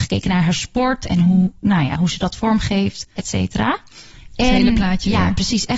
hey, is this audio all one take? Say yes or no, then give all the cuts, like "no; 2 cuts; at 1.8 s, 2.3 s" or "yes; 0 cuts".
no; 1 cut; at 3.2 s